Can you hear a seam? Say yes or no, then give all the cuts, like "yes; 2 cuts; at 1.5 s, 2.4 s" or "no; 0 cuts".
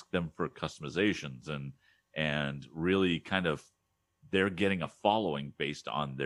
no; 0 cuts